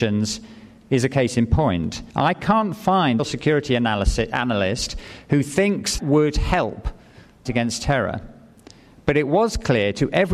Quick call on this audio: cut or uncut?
cut